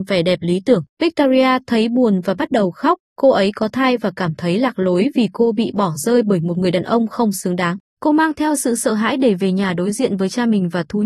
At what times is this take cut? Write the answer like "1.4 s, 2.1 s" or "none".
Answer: 0.9 s, 3.1 s, 7.9 s